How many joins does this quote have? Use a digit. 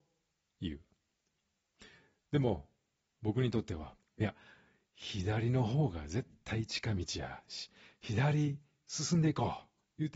0